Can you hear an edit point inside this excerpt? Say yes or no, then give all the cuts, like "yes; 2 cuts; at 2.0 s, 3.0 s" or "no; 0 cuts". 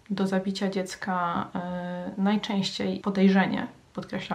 yes; 1 cut; at 3.0 s